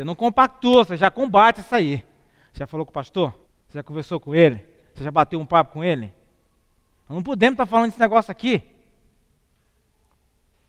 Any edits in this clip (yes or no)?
yes